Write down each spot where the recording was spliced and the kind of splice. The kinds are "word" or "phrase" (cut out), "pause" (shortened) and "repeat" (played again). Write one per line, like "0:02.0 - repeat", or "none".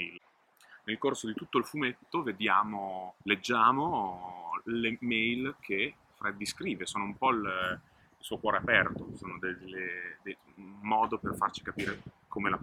0:03.2 - pause